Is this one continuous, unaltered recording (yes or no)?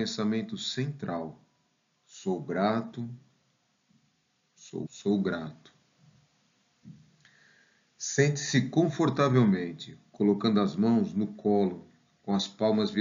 no